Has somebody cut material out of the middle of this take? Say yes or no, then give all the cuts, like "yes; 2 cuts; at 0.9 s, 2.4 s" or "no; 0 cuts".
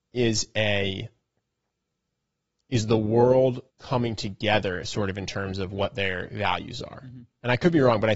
yes; 1 cut; at 3.7 s